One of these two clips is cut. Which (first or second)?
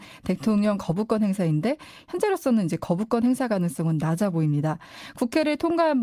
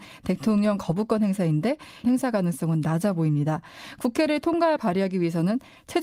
second